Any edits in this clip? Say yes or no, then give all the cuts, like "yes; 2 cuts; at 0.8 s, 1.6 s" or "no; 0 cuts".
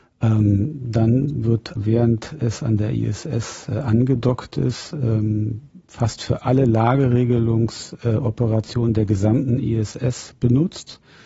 yes; 1 cut; at 1.8 s